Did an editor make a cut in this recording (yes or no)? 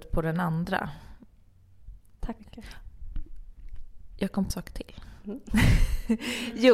yes